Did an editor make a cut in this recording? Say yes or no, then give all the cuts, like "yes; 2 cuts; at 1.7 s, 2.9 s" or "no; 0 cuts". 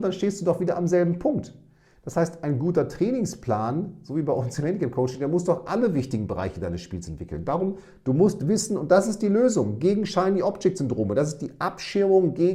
no; 0 cuts